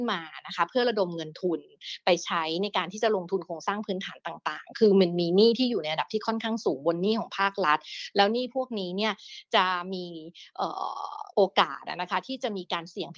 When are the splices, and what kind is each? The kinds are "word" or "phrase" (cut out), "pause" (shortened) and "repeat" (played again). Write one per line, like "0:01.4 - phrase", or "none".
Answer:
0:11.3 - pause